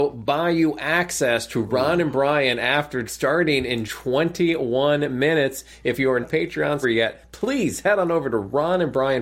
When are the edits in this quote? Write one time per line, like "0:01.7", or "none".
0:03.0
0:03.8
0:06.2
0:06.8